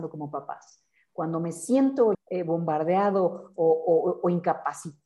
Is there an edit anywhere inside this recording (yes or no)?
yes